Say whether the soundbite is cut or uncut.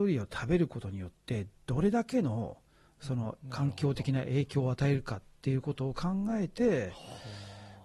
uncut